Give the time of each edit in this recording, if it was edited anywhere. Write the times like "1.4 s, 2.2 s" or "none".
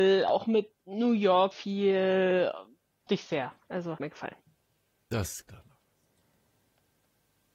1.5 s, 3.1 s, 4.0 s, 5.4 s